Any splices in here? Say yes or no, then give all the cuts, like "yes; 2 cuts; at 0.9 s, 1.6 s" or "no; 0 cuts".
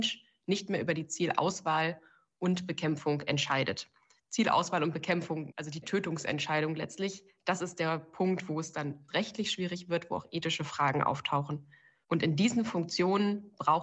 no; 0 cuts